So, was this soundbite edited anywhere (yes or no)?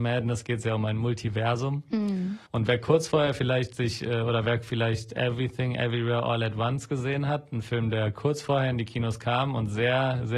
yes